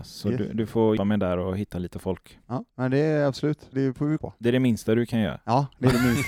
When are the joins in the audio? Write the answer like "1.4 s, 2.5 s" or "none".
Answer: 1.0 s, 2.7 s, 3.7 s, 4.2 s